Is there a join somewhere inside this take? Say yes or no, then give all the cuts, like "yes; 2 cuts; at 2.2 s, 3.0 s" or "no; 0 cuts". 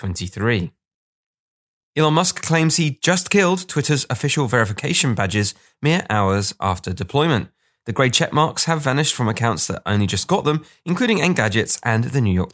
no; 0 cuts